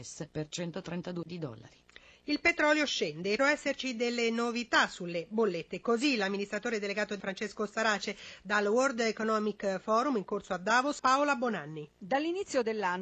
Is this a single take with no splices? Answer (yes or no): no